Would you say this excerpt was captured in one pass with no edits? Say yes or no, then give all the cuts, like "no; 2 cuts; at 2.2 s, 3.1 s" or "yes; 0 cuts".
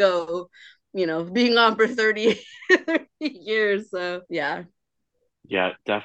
no; 1 cut; at 4.2 s